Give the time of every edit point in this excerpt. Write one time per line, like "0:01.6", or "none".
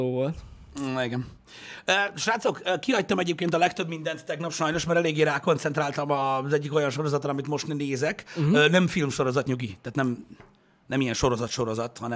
none

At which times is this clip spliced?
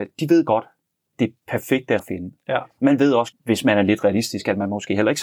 0:01.1
0:02.0
0:03.3

